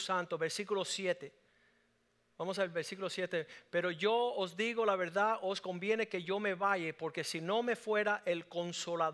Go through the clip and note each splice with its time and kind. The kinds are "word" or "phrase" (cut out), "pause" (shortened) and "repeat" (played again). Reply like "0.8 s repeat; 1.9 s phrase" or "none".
none